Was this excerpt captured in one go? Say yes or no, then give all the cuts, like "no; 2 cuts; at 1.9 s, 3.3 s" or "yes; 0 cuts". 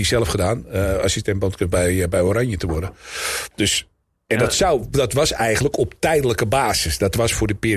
no; 1 cut; at 3.5 s